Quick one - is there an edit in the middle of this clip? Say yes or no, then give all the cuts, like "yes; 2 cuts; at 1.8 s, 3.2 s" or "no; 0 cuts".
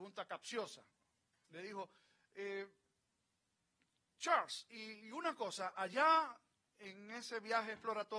no; 0 cuts